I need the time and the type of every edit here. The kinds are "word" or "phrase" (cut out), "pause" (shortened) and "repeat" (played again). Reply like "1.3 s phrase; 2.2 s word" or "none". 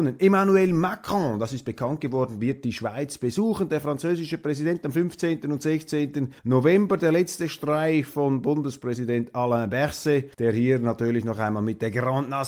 6.4 s pause; 10.3 s pause